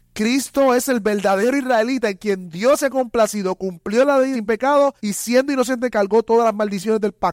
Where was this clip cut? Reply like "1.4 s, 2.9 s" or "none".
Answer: 4.3 s, 5.0 s